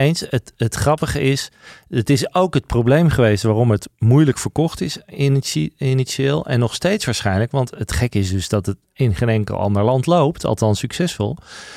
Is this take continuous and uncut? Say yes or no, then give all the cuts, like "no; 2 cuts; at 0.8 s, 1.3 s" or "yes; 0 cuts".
yes; 0 cuts